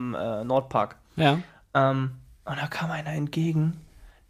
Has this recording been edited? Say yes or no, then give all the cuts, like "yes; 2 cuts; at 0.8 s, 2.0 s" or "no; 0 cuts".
no; 0 cuts